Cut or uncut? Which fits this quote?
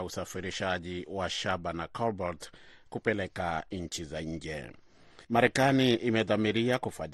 cut